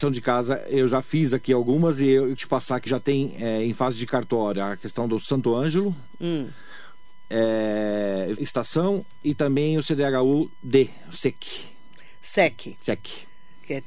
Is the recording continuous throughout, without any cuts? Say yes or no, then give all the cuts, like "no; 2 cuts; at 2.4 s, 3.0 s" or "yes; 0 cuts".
no; 3 cuts; at 2.4 s, 2.9 s, 8.4 s